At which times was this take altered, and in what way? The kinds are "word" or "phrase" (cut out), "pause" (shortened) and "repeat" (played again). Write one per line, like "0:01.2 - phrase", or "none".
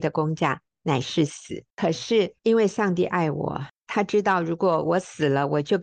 0:01.7 - pause
0:02.4 - pause